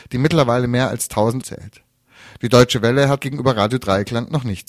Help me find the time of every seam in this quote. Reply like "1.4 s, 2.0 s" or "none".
1.4 s, 3.2 s

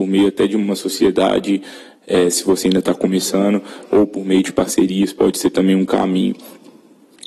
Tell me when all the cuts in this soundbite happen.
none

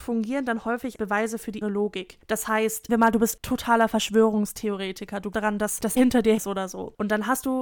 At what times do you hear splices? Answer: 1.0 s, 1.6 s, 2.9 s, 3.4 s, 5.3 s, 6.0 s, 6.4 s

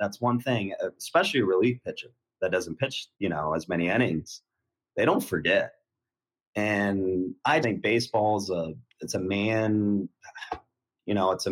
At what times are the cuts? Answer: 3.1 s, 7.6 s

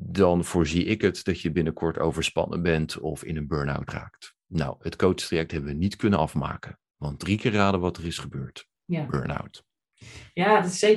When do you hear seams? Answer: 8.7 s

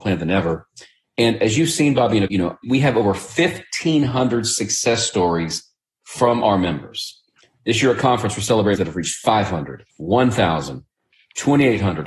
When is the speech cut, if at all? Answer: 2.3 s, 2.6 s, 8.8 s, 9.9 s

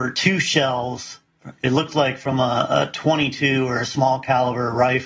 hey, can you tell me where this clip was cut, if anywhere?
none

